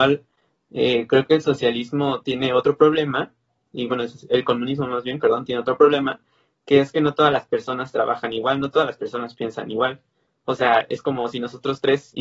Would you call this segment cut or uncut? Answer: uncut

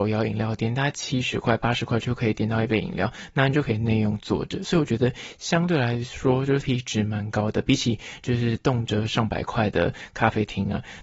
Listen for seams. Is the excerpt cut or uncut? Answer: cut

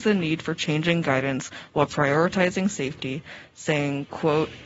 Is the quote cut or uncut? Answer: uncut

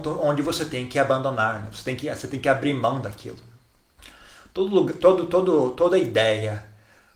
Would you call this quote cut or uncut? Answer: uncut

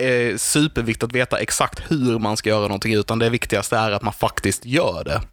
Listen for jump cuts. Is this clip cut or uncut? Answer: uncut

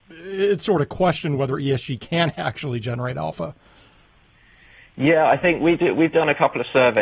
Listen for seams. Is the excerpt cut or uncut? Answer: uncut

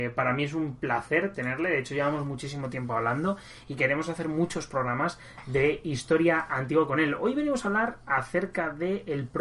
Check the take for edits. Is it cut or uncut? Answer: uncut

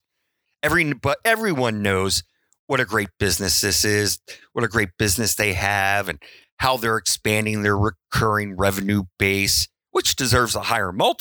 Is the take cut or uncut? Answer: uncut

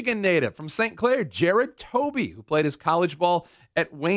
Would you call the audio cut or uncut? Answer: uncut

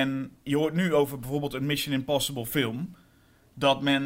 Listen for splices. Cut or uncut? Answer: uncut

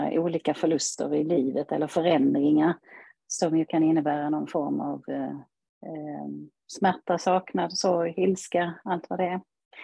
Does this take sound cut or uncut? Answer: uncut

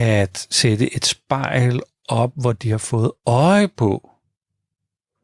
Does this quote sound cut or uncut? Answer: uncut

